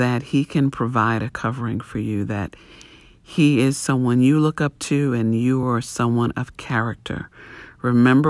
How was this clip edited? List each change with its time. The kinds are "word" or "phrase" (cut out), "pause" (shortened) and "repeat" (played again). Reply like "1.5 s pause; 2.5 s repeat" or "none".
none